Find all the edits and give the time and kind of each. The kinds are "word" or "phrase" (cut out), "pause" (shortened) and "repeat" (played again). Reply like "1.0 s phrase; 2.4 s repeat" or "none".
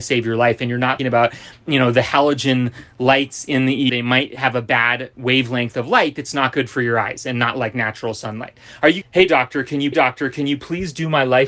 1.0 s word; 3.9 s word; 5.1 s word; 9.0 s phrase; 9.9 s repeat